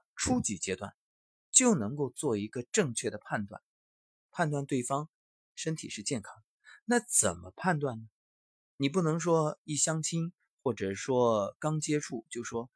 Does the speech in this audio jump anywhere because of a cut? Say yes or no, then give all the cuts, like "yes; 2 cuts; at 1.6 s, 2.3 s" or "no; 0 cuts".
no; 0 cuts